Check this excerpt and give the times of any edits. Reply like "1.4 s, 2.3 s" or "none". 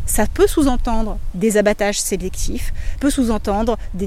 1.3 s, 3.0 s